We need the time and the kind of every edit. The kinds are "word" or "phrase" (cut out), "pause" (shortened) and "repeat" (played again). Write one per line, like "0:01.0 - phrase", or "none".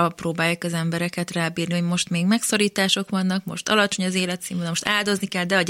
none